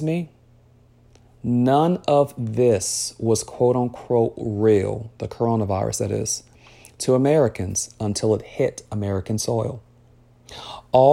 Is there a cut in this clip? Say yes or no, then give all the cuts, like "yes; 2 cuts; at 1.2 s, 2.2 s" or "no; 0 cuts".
no; 0 cuts